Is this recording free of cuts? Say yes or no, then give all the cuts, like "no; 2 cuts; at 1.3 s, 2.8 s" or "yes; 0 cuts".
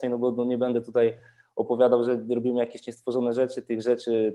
yes; 0 cuts